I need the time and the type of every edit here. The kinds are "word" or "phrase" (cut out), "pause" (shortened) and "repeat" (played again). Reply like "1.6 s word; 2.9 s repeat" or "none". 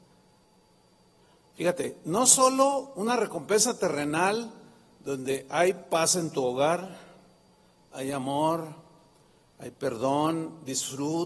none